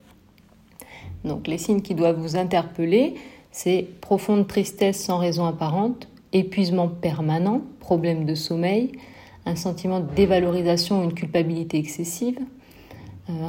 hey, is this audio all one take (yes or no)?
yes